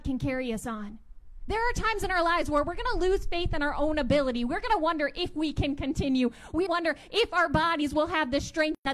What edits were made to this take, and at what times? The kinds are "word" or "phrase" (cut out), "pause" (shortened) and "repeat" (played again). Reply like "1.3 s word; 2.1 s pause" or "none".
6.7 s phrase